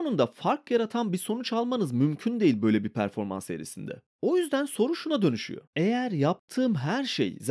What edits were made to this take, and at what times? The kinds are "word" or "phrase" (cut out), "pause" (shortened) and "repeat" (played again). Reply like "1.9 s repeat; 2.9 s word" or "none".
5.7 s pause